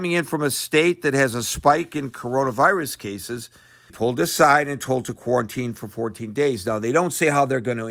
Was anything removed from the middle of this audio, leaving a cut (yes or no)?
yes